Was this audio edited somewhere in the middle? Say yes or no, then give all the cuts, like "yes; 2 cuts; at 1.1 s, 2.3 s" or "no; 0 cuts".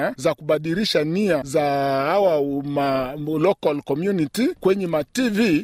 no; 0 cuts